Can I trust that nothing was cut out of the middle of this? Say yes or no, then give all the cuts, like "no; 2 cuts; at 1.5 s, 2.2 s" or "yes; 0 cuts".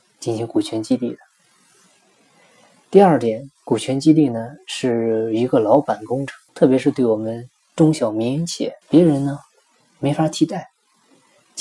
no; 2 cuts; at 6.5 s, 8.8 s